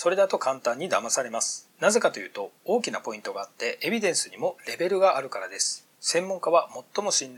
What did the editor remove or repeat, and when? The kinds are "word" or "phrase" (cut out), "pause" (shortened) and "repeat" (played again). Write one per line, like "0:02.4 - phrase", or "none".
0:01.7 - pause
0:05.9 - pause